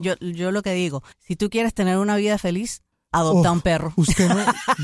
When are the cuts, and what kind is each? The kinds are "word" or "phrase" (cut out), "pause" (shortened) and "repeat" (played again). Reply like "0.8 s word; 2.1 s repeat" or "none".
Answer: 1.1 s pause; 2.9 s pause